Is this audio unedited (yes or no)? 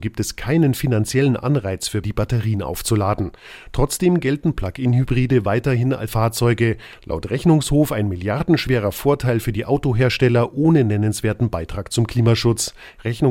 no